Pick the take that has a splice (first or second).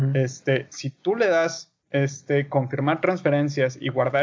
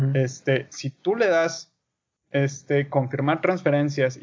first